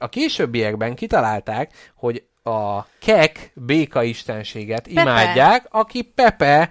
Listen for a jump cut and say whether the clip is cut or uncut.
uncut